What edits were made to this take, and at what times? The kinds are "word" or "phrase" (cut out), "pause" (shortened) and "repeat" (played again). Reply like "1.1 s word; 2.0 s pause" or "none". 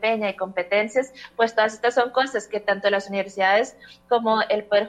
none